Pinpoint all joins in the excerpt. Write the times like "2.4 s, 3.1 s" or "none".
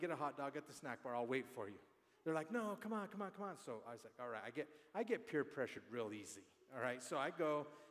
none

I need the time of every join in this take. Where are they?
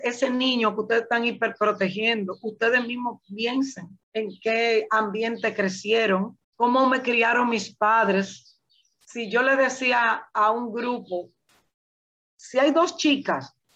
4.0 s, 6.4 s, 8.7 s

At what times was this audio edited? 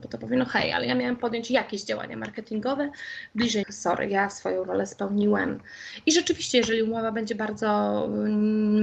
3.6 s

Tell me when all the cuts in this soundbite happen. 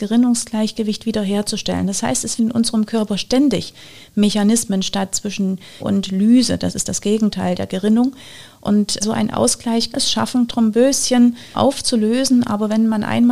2.4 s, 5.8 s, 9.0 s, 9.9 s, 10.5 s, 11.5 s

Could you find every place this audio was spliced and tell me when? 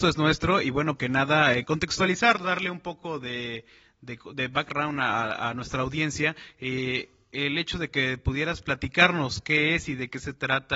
1.0 s

